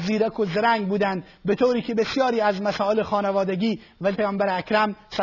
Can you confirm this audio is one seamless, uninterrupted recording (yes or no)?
no